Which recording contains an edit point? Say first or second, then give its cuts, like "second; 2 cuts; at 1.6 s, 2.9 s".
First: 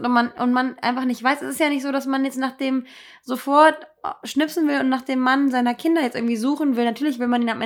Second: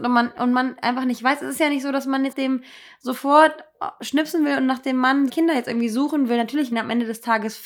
second; 3 cuts; at 2.3 s, 5.3 s, 6.7 s